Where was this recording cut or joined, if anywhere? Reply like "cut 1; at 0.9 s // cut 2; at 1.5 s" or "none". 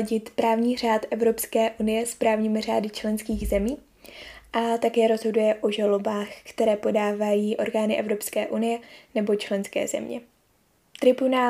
none